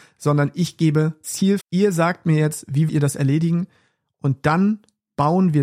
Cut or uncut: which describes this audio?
cut